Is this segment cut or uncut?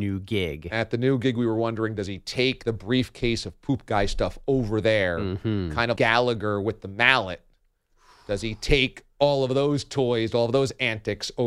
cut